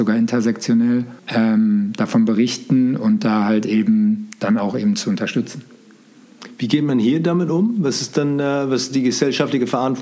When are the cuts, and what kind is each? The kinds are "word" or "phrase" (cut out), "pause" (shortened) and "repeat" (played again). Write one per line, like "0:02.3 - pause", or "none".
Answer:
0:01.2 - pause